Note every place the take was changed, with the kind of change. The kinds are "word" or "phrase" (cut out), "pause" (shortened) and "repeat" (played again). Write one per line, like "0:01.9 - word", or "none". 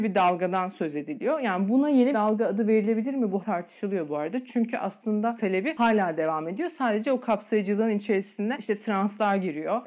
0:02.1 - word
0:03.4 - word
0:05.4 - phrase